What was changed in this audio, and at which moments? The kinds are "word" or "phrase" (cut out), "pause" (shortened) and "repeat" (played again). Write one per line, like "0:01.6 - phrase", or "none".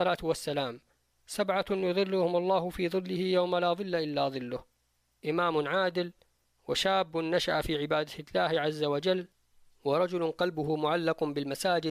none